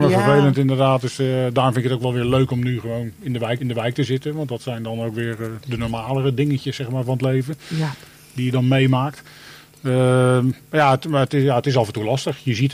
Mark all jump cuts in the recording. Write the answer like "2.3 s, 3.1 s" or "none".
3.6 s